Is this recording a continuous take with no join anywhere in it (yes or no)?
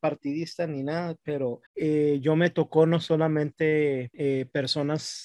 no